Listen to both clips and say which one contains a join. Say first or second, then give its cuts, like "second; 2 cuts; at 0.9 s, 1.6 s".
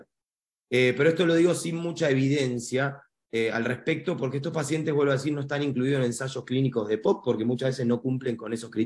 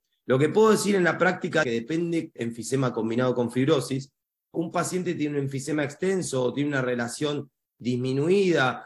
second; 3 cuts; at 1.6 s, 2.4 s, 4.5 s